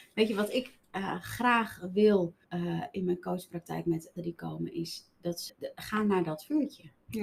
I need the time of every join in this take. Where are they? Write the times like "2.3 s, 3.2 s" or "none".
2.4 s, 4.2 s, 5.5 s